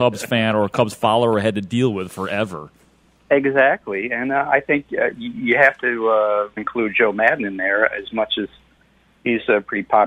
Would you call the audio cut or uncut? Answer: cut